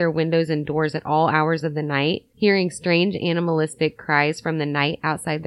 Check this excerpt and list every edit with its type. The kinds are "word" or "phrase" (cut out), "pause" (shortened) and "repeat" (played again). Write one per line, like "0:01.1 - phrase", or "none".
none